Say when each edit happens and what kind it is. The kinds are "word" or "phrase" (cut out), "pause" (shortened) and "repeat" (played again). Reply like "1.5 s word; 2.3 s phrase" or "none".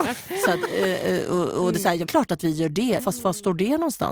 2.1 s word; 3.0 s word